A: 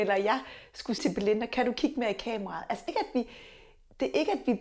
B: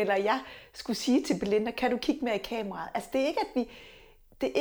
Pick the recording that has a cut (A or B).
A